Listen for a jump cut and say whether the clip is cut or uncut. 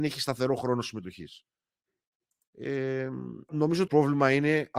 cut